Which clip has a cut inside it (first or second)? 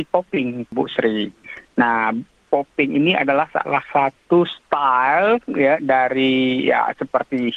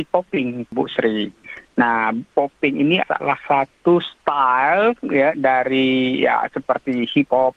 second